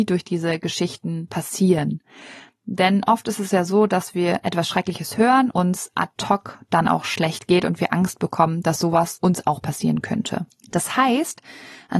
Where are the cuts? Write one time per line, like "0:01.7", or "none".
0:05.5